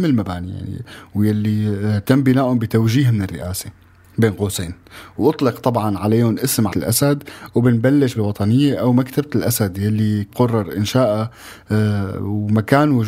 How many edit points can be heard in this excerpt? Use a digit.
3